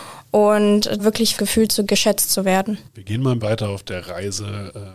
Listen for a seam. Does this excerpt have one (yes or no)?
yes